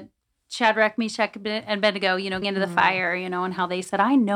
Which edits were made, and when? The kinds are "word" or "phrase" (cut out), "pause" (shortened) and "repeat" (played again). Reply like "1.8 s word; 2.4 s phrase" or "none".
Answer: 2.4 s word